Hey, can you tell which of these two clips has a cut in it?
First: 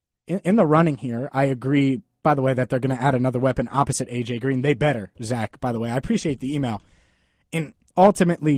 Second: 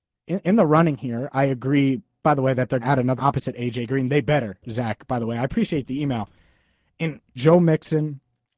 second; 3 cuts; at 2.8 s, 3.2 s, 7.4 s

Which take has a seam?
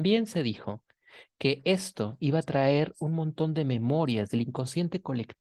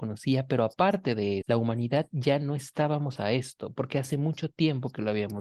second; 2 cuts; at 1.4 s, 3.2 s

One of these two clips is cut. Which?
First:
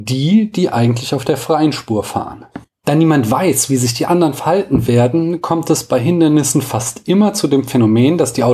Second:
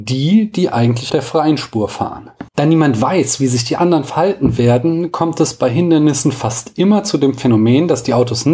second; 2 cuts; at 1.1 s, 2.5 s

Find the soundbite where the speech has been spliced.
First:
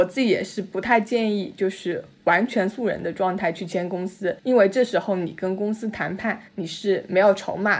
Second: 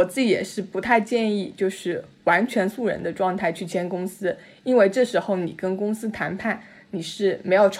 first; 2 cuts; at 4.4 s, 6.5 s

